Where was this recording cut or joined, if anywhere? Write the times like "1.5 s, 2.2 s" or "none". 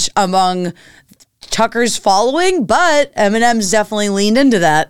none